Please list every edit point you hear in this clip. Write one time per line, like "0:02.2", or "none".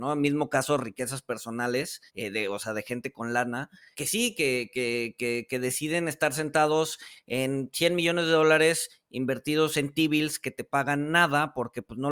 0:02.1
0:03.9